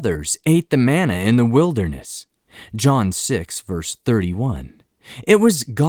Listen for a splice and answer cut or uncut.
uncut